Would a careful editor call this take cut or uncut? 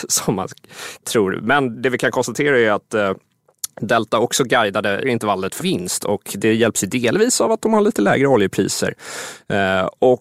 cut